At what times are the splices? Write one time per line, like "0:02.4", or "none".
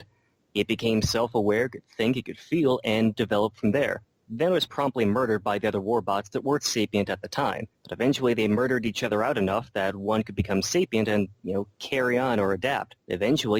0:04.7
0:07.7